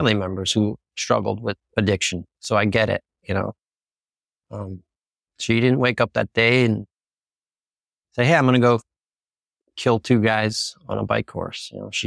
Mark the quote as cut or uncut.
uncut